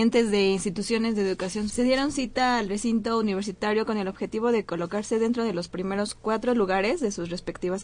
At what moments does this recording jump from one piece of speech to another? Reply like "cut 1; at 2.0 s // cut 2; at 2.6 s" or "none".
cut 1; at 1.7 s